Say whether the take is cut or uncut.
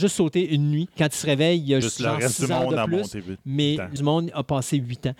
cut